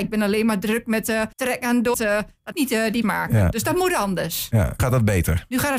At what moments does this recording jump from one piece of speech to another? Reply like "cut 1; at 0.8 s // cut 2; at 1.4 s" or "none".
cut 1; at 1.3 s // cut 2; at 1.9 s // cut 3; at 2.5 s // cut 4; at 3.0 s // cut 5; at 4.8 s